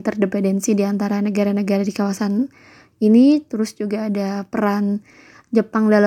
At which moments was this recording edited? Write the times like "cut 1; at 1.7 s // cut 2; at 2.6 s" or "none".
none